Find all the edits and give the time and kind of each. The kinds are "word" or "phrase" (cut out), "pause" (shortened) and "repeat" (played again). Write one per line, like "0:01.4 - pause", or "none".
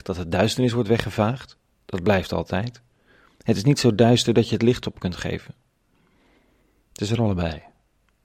none